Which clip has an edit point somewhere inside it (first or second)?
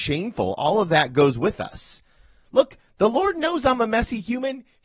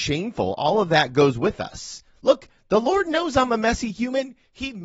second